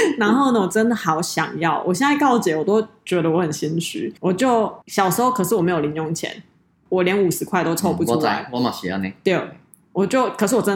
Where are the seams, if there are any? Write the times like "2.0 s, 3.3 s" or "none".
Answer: 4.2 s, 4.8 s